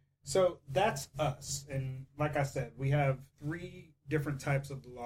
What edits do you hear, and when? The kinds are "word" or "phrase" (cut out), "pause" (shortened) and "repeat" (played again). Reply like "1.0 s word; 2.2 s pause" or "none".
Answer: 3.3 s pause

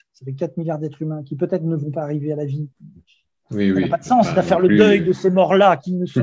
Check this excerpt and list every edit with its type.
2.7 s pause

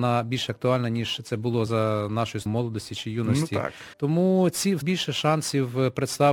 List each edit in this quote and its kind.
1.7 s word; 2.5 s word; 3.9 s pause; 4.8 s phrase

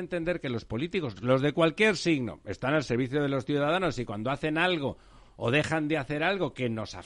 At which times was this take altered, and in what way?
none

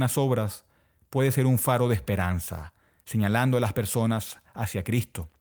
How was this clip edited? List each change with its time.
none

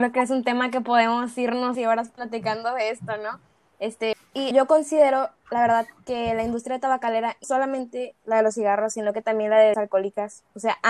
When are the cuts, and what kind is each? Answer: 1.7 s word; 4.5 s word; 7.4 s word; 9.7 s word

